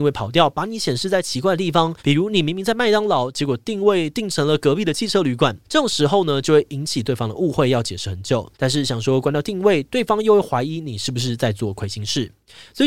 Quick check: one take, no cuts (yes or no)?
no